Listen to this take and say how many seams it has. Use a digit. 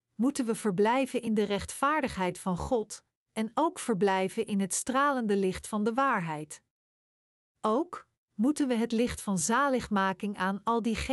0